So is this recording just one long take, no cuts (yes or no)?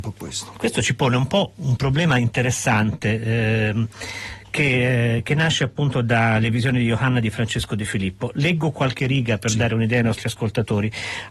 yes